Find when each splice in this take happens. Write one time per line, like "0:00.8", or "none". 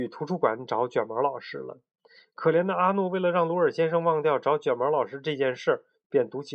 none